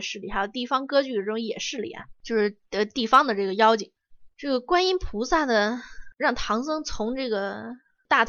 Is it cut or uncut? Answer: cut